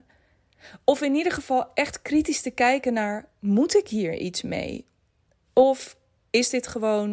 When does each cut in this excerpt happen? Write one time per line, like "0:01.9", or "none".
none